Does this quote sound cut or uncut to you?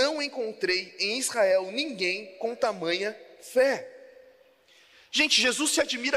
uncut